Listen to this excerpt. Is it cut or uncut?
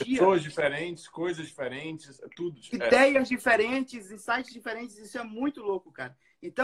uncut